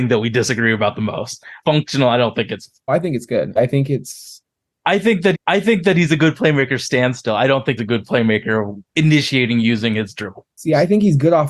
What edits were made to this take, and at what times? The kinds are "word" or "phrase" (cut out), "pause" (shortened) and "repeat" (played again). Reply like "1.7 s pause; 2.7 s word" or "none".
1.6 s phrase; 2.9 s phrase; 3.6 s word; 5.3 s repeat; 7.8 s word; 8.8 s pause

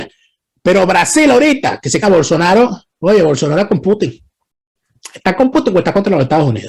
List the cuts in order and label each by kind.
2.0 s phrase

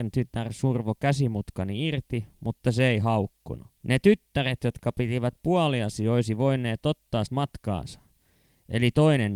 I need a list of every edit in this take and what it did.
3.7 s pause; 7.3 s word

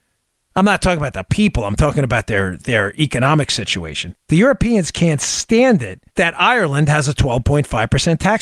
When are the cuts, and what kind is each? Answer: 4.2 s pause; 6.1 s pause

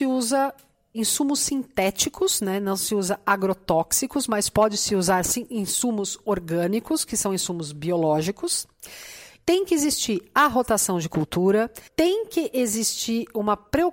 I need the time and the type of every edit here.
11.9 s pause

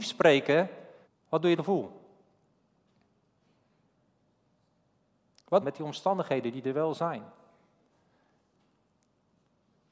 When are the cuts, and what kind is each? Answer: 1.0 s pause; 1.6 s phrase; 5.6 s phrase

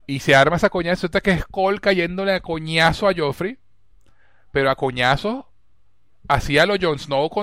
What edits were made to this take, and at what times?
none

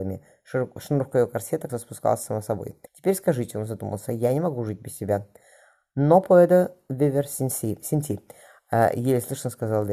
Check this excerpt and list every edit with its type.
1.7 s word; 2.9 s pause

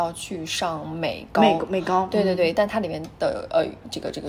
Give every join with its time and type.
none

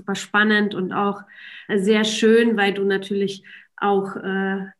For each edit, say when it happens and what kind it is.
1.7 s word

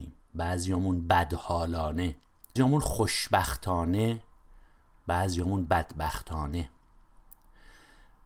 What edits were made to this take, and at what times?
2.6 s word

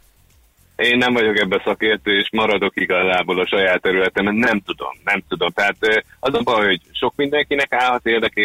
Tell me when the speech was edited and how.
none

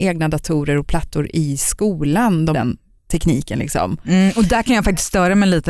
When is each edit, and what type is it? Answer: 2.5 s phrase

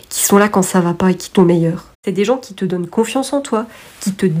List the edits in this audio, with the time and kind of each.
1.4 s word; 1.9 s pause

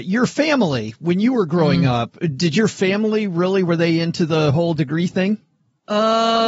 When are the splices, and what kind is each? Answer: none

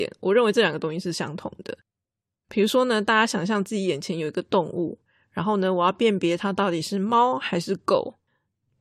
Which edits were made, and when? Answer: none

